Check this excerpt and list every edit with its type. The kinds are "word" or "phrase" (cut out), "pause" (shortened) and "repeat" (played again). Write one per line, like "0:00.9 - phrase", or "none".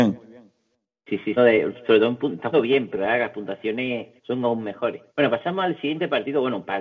0:01.4 - phrase
0:02.5 - word
0:04.2 - pause
0:05.1 - pause